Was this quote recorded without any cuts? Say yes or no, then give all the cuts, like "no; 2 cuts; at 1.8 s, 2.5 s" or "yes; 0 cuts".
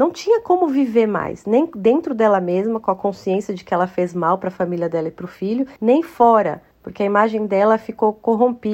no; 2 cuts; at 5.8 s, 6.7 s